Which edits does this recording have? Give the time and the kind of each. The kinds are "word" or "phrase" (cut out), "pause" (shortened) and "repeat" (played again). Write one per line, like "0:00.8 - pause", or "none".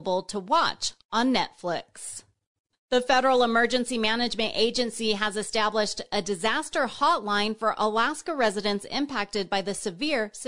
none

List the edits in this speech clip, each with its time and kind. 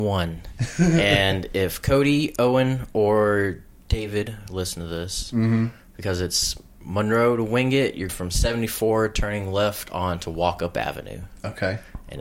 0:08.1 - word

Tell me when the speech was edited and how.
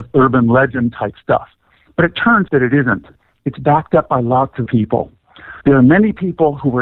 0:02.5 - word
0:04.7 - word
0:05.6 - pause

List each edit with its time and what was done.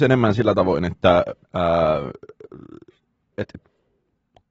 0:01.4 - pause

